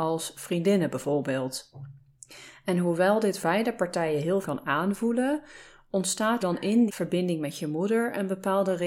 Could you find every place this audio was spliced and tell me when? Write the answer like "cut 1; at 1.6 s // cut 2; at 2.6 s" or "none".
cut 1; at 3.4 s // cut 2; at 4.4 s // cut 3; at 6.4 s // cut 4; at 6.9 s